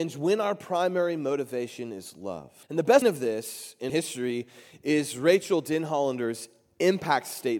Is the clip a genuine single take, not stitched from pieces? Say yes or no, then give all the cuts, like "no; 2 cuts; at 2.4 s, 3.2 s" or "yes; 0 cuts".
no; 3 cuts; at 2.6 s, 3.0 s, 3.9 s